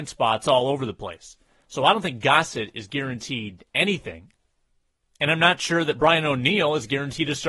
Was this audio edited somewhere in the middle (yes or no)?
no